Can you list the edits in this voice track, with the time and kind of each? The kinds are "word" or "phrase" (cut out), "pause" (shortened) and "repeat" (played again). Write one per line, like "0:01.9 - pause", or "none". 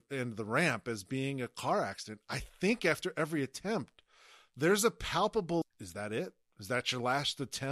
0:05.6 - word